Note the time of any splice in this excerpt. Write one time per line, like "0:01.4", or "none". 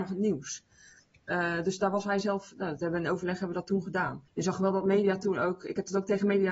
0:04.3

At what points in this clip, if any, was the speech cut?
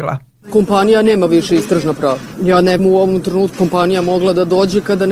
0:02.8
0:03.5

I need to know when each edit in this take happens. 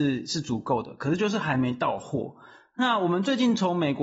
none

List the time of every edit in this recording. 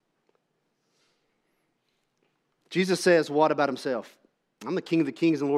none

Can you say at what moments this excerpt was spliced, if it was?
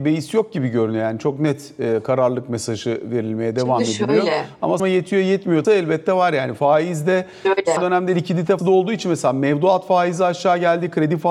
0:04.8
0:05.6
0:07.8
0:08.6

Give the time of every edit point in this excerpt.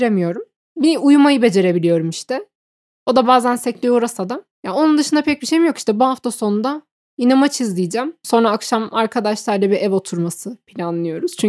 none

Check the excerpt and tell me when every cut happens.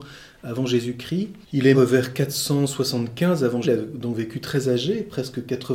0:01.4
0:01.7
0:03.6

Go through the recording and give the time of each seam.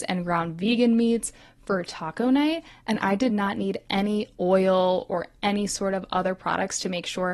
none

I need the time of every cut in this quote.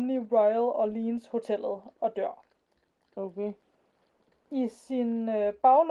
none

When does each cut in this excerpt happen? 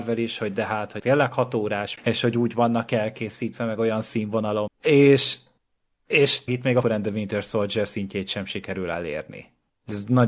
0:01.0
0:02.0
0:04.7
0:06.5
0:06.8

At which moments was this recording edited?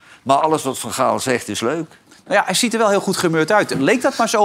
none

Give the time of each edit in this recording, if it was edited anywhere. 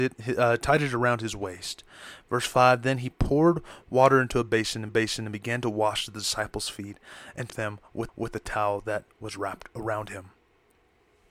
0:04.9
0:07.5
0:08.1

